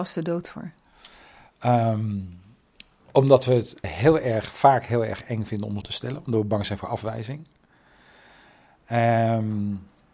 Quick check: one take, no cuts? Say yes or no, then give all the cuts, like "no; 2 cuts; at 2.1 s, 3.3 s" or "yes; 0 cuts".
no; 3 cuts; at 2.8 s, 3.8 s, 5.8 s